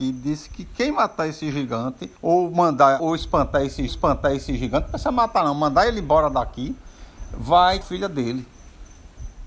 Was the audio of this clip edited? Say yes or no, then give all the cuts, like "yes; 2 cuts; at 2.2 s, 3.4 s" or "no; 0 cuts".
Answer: yes; 4 cuts; at 2.2 s, 3.0 s, 3.9 s, 7.8 s